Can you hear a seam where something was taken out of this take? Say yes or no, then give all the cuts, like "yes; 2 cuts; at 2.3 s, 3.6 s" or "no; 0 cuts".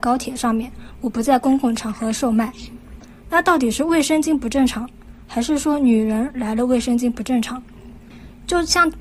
no; 0 cuts